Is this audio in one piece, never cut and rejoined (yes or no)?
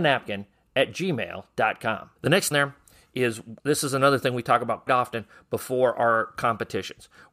no